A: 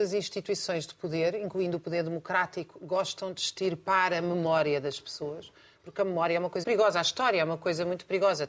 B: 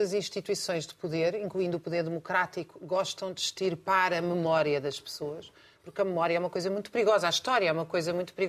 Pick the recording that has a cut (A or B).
A